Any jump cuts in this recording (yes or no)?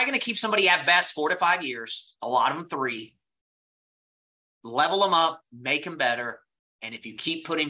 no